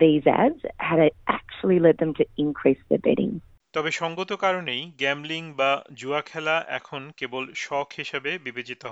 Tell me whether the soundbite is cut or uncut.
uncut